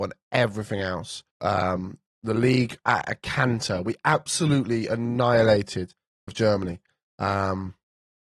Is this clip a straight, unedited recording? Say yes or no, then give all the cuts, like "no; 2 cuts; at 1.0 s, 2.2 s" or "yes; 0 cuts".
no; 2 cuts; at 1.3 s, 6.3 s